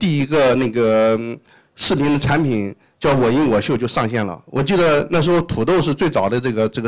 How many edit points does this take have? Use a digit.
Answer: 0